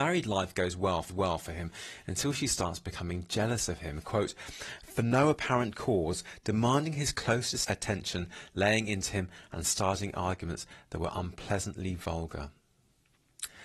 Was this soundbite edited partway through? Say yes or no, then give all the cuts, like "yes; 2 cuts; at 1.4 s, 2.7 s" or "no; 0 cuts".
yes; 1 cut; at 1.1 s